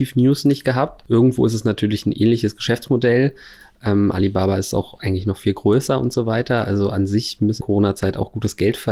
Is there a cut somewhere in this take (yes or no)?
yes